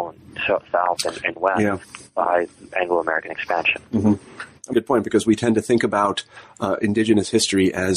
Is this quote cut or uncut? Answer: cut